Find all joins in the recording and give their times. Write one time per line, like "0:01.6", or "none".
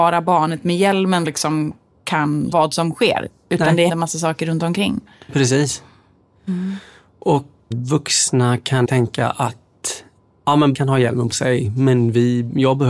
0:01.2
0:02.5
0:03.9
0:07.7
0:08.8
0:10.7
0:11.3